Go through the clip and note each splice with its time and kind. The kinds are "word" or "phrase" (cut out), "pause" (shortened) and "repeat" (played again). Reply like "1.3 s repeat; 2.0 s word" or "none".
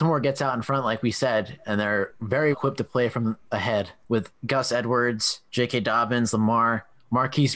2.5 s word